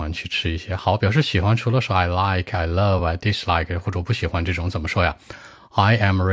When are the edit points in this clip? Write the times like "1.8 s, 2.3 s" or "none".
none